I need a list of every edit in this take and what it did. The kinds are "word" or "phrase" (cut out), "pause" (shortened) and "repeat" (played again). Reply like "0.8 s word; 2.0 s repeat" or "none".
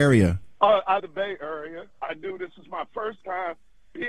1.0 s word; 1.9 s pause